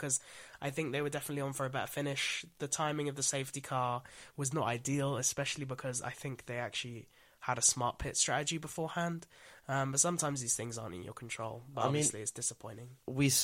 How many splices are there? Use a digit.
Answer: 0